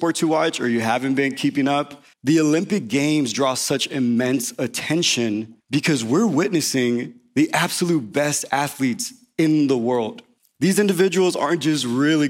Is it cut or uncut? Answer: cut